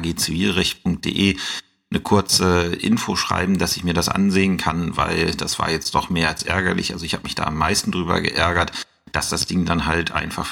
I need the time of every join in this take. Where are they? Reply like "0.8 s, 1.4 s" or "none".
none